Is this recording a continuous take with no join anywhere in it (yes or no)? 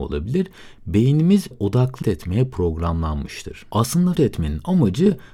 no